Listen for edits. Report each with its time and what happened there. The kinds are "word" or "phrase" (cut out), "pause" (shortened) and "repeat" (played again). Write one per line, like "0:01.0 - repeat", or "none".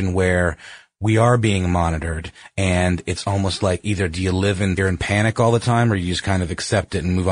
0:04.8 - word